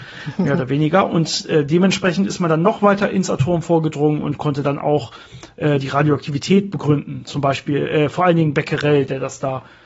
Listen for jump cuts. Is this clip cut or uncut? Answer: uncut